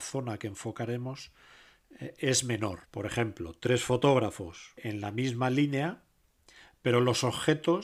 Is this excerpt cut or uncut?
cut